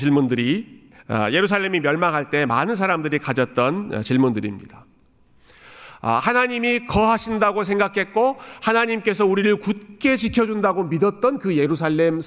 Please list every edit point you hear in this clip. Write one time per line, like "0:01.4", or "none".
0:01.0